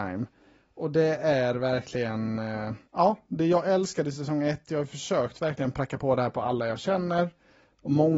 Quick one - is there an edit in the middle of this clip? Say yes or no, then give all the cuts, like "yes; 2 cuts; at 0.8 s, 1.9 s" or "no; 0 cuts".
yes; 1 cut; at 2.9 s